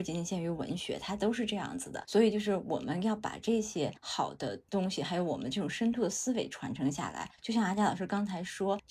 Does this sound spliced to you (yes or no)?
no